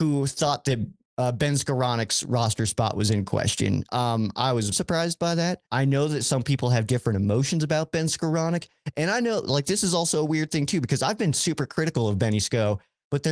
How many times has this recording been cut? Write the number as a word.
two